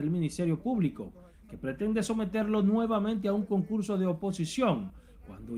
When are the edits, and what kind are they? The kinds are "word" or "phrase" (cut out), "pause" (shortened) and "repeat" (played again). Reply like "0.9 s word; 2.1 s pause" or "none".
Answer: none